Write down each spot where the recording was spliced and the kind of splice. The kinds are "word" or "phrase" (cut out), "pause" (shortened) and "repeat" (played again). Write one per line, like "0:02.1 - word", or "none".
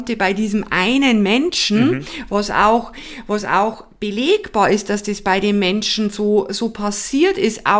none